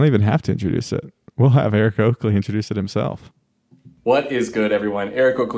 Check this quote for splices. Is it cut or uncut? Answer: uncut